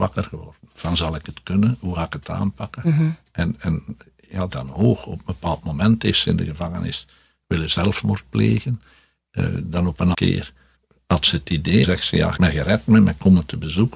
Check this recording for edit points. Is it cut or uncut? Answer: cut